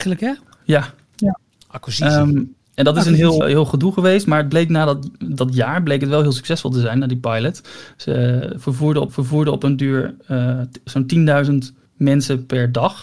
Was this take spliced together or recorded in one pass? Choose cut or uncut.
cut